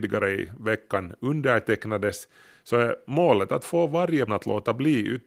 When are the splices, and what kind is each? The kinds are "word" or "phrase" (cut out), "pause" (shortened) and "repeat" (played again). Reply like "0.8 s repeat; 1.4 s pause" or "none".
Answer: 4.3 s word